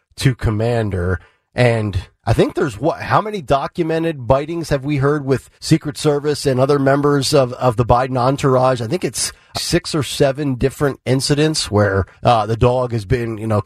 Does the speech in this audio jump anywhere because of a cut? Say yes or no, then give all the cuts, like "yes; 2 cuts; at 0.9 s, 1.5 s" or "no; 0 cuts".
yes; 3 cuts; at 5.5 s, 9.5 s, 12.1 s